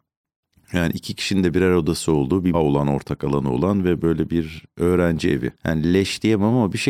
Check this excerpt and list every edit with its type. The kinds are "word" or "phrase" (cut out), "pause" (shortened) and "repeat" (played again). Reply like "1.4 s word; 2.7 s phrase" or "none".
2.5 s word; 5.5 s pause